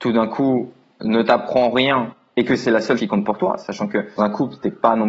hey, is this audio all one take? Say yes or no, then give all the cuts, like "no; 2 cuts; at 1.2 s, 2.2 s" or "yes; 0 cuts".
no; 2 cuts; at 3.0 s, 4.2 s